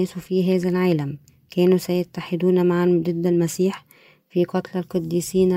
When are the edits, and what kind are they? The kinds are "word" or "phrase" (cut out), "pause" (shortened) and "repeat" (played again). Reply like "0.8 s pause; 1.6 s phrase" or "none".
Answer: none